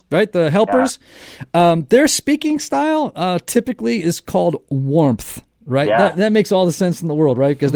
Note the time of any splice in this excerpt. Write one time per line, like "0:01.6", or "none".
none